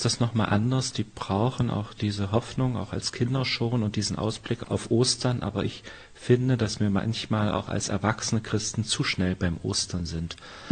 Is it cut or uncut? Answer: uncut